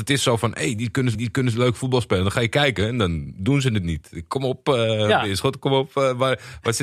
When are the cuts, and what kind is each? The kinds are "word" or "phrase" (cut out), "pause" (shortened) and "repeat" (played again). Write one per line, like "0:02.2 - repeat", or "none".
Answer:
0:01.1 - repeat